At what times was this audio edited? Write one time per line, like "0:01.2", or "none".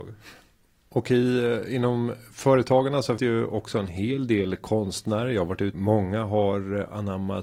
0:03.2
0:05.7